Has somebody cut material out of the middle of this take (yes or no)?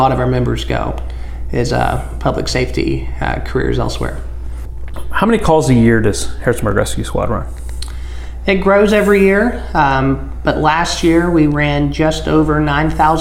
no